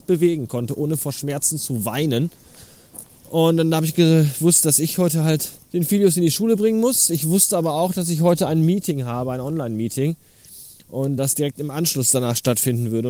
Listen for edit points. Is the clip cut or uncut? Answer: cut